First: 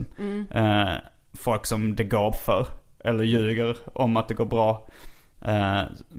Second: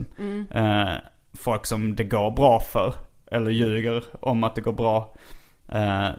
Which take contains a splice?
first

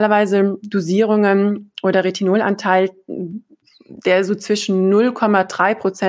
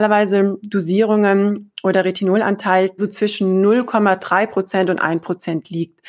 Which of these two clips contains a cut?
second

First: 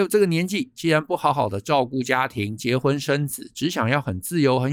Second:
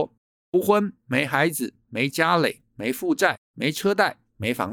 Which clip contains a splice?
second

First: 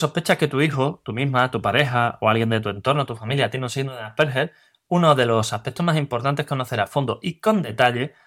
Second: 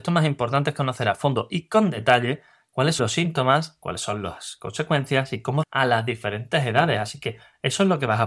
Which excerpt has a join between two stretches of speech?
second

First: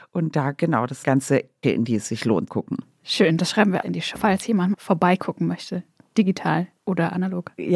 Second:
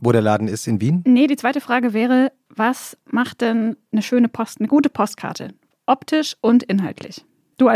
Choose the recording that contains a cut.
first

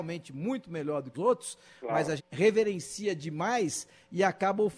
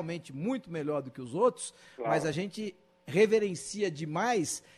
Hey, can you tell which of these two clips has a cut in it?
first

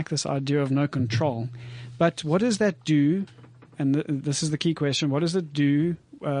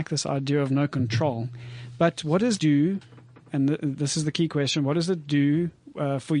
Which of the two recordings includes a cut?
second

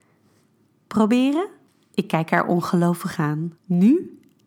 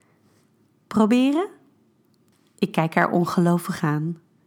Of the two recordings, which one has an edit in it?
first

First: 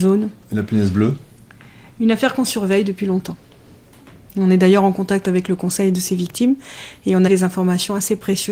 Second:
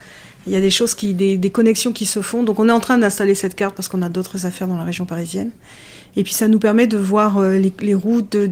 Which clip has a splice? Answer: first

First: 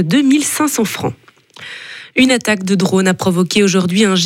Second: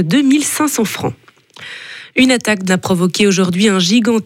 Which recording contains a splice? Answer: second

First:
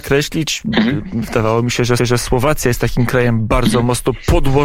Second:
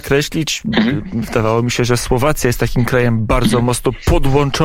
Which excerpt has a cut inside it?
first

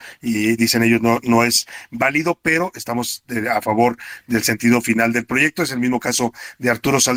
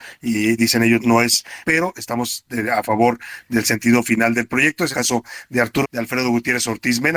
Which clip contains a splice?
second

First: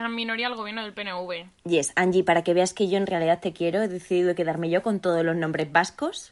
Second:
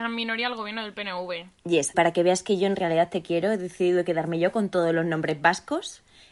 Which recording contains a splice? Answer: second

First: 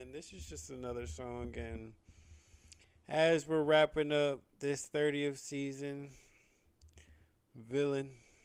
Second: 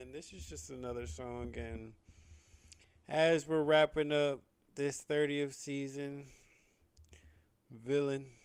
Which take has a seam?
first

